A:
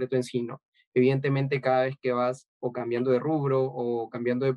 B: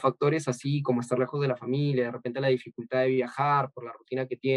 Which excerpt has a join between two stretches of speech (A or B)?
A